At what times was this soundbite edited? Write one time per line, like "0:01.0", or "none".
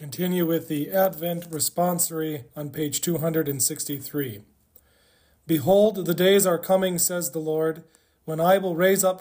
none